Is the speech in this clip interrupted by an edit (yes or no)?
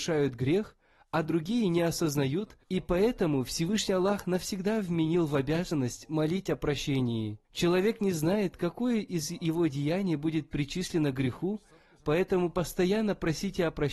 yes